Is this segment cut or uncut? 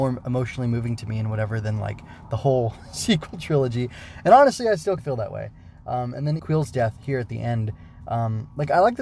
cut